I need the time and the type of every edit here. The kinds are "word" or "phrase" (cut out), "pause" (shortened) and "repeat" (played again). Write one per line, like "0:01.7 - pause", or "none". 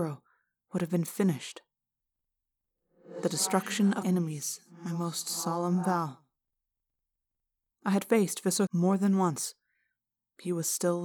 0:04.0 - word
0:08.7 - word